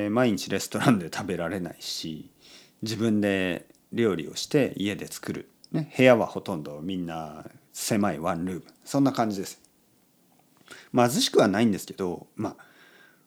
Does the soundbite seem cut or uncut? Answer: uncut